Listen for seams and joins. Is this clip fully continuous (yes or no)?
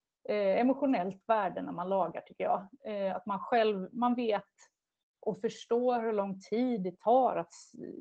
yes